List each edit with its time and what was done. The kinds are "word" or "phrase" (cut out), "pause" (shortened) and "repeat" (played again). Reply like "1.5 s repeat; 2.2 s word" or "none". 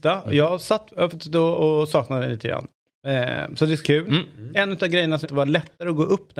1.1 s word; 3.8 s word; 5.2 s word